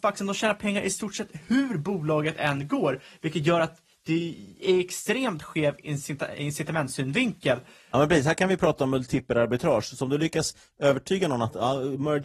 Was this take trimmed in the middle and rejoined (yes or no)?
no